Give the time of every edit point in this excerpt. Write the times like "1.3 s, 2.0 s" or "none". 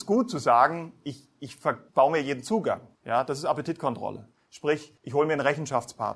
1.9 s, 2.9 s, 5.0 s